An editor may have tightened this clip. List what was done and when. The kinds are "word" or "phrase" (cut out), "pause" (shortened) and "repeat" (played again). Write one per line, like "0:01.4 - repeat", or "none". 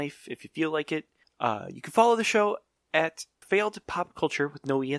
none